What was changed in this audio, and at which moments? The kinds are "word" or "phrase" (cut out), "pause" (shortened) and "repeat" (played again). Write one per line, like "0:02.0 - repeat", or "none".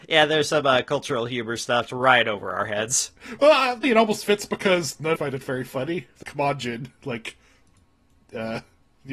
0:01.9 - word
0:03.8 - word
0:05.2 - phrase
0:06.2 - word